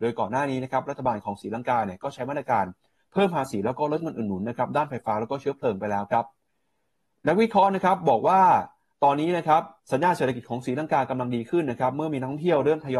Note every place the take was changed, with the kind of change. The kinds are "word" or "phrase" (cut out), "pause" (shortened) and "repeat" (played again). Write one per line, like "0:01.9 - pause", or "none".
0:09.8 - pause